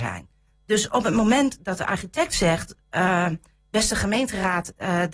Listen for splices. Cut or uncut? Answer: uncut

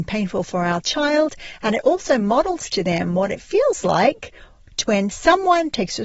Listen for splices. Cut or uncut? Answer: uncut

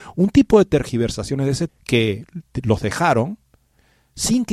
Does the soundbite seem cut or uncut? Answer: cut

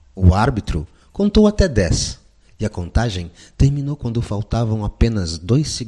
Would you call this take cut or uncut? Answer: uncut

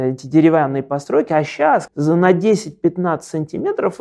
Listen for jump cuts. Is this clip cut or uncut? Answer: cut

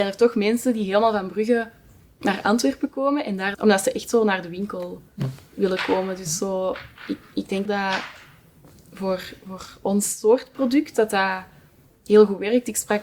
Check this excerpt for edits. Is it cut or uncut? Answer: cut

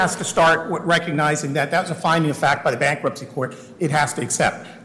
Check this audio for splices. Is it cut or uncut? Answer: uncut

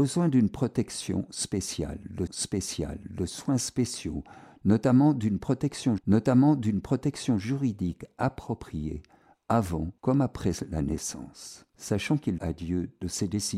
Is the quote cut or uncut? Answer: cut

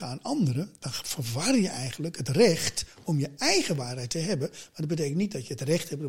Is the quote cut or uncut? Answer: uncut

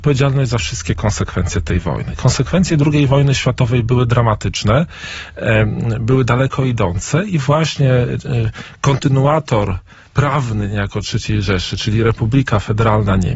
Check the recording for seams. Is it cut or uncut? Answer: uncut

